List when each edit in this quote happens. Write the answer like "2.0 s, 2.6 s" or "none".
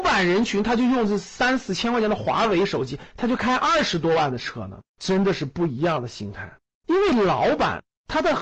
4.9 s, 6.7 s